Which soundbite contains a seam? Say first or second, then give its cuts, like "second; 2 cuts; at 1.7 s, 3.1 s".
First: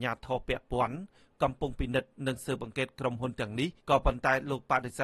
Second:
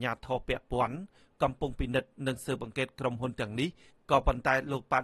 first; 1 cut; at 3.8 s